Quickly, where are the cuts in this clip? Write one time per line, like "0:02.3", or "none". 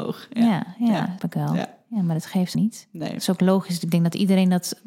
0:01.2
0:02.5